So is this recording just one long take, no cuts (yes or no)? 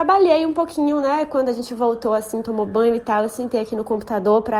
yes